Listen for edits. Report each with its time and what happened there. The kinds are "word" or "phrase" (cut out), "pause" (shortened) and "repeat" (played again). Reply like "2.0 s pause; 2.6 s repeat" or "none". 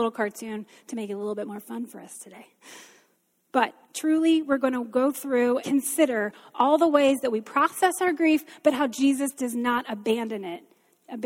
3.8 s pause; 5.6 s word